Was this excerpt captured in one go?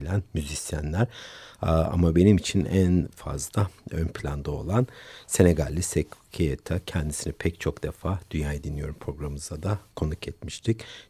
yes; 0 cuts

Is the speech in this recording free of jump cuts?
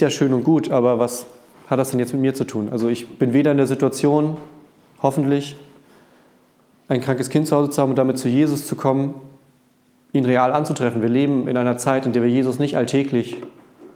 yes; 0 cuts

